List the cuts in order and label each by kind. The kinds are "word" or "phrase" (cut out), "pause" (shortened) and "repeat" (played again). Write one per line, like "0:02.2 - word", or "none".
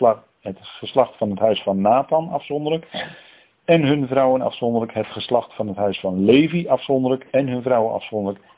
0:07.3 - pause